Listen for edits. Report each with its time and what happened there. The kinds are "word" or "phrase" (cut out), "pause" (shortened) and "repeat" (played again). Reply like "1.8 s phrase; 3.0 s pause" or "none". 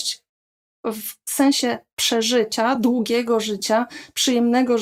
none

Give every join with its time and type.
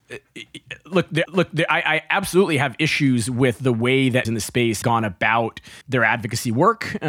1.3 s repeat; 4.2 s phrase; 4.8 s word; 5.8 s pause

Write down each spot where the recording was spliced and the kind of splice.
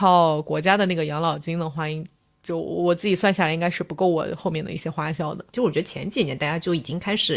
none

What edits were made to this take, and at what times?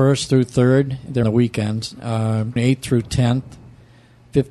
1.2 s word; 2.6 s word

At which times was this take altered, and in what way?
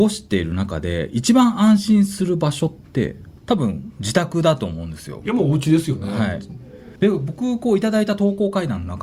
3.4 s pause; 7.0 s pause

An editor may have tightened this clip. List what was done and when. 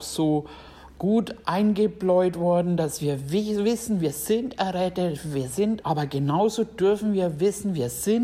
5.8 s word

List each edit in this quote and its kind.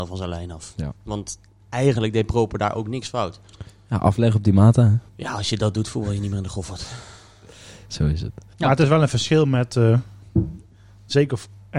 1.0 s pause; 5.1 s pause; 8.5 s pause

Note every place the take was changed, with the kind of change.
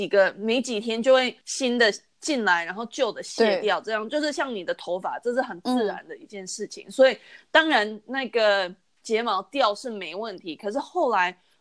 1.4 s pause

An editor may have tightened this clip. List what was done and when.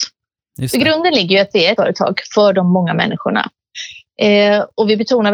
1.8 s word

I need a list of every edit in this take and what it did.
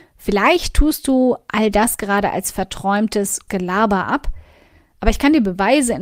3.5 s word

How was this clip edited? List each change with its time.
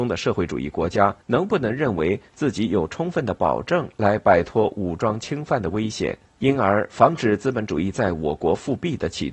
1.2 s pause; 6.3 s pause

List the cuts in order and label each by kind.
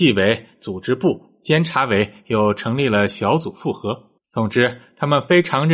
4.2 s pause

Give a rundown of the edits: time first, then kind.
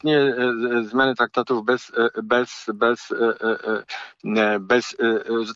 none

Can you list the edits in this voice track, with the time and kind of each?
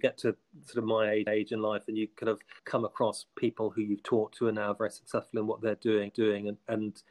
1.3 s repeat; 2.6 s pause; 6.1 s repeat

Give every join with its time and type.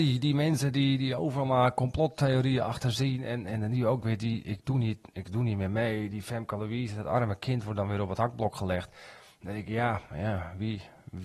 3.4 s word

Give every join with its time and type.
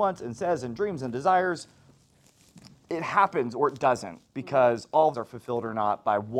5.1 s phrase

